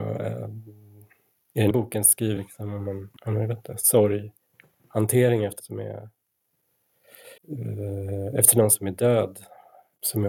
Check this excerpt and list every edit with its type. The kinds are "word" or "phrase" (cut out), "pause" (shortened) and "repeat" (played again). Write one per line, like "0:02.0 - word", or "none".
0:01.7 - word
0:02.4 - word
0:03.2 - pause
0:05.6 - word
0:07.4 - pause